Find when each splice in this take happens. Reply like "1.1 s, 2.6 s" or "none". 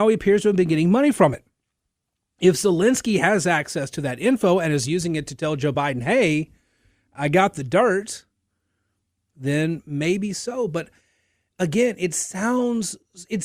none